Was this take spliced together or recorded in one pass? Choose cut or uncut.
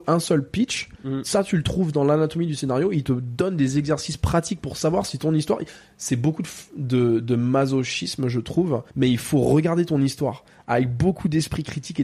cut